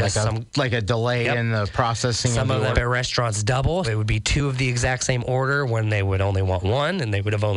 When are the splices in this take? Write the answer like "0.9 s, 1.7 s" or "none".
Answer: 2.7 s, 3.8 s